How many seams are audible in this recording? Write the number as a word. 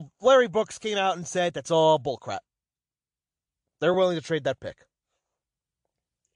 zero